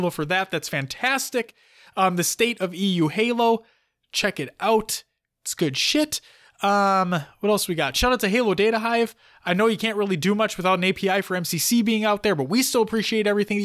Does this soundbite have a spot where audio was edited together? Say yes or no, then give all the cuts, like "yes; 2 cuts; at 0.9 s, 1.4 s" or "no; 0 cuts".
no; 0 cuts